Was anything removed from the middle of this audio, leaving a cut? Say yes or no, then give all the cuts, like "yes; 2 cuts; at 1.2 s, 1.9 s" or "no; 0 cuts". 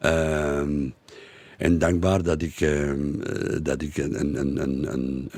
no; 0 cuts